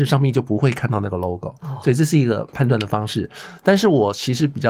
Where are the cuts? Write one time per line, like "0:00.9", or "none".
none